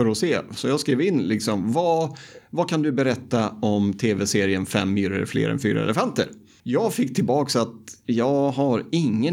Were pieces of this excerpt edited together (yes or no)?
no